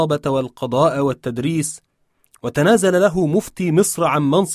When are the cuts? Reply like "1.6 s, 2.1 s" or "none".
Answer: none